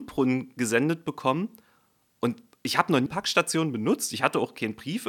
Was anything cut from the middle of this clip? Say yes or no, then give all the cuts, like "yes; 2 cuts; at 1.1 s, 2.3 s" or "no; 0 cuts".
yes; 1 cut; at 3.1 s